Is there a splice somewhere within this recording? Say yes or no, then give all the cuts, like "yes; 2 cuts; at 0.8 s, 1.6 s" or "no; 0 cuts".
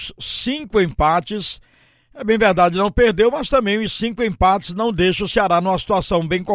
no; 0 cuts